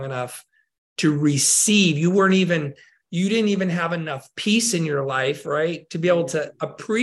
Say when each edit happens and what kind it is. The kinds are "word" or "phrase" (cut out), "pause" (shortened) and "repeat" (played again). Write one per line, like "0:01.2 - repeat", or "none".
none